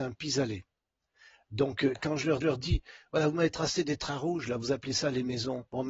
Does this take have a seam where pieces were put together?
yes; 1 cut; at 2.4 s

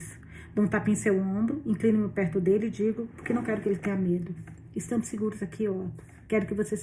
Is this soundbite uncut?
yes; 0 cuts

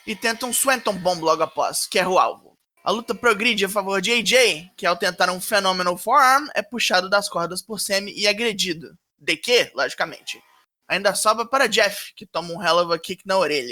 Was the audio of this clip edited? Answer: no; 0 cuts

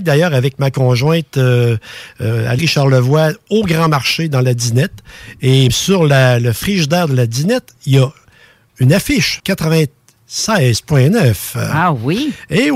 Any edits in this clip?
yes; 3 cuts; at 2.6 s, 5.7 s, 9.4 s

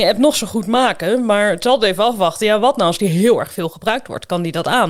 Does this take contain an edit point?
no; 0 cuts

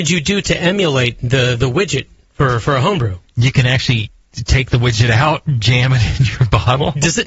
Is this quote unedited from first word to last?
yes; 0 cuts

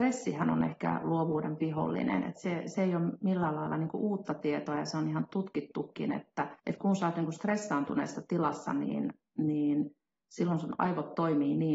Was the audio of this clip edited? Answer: yes; 2 cuts; at 1.6 s, 6.6 s

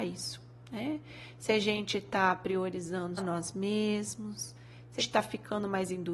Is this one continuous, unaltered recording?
no; 2 cuts; at 3.2 s, 5.0 s

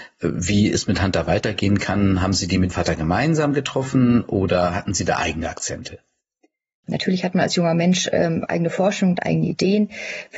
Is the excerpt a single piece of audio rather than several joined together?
no; 1 cut; at 2.7 s

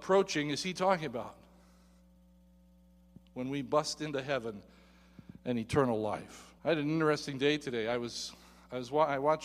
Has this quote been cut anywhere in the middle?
yes; 1 cut; at 6.6 s

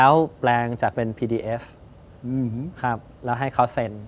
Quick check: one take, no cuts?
no; 1 cut; at 0.9 s

